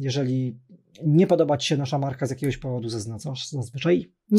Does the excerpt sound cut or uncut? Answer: uncut